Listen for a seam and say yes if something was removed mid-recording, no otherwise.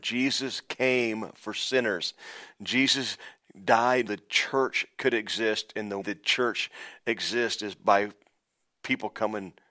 yes